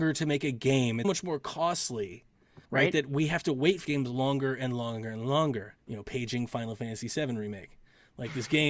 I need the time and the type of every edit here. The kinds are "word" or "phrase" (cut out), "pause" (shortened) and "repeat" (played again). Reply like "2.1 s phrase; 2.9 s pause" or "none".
1.0 s word; 2.6 s pause; 3.8 s word; 5.8 s pause